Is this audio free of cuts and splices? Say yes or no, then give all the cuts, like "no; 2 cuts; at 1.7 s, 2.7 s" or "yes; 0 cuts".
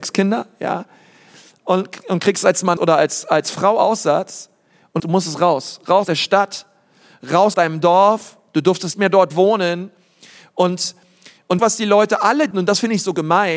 no; 7 cuts; at 2.8 s, 5.0 s, 6.0 s, 7.5 s, 8.9 s, 11.6 s, 12.5 s